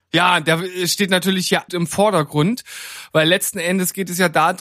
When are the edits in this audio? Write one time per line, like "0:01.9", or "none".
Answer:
0:01.7

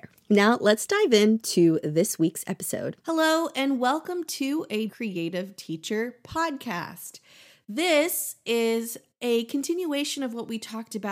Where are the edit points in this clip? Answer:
0:03.0
0:04.9

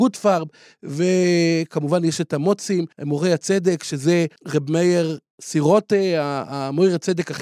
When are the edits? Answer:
0:02.9
0:04.4

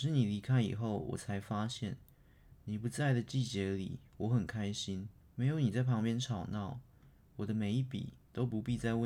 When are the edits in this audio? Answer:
0:05.2

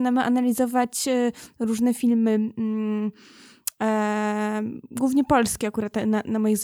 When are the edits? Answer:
none

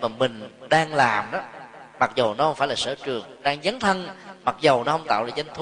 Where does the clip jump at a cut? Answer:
0:03.4

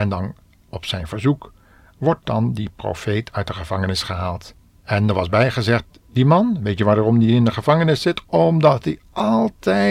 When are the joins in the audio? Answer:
0:04.6

